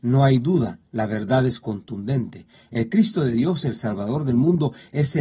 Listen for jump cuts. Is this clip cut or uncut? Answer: uncut